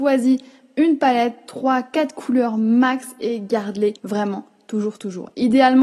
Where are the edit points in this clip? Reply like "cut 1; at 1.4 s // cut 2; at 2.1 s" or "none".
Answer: cut 1; at 4.0 s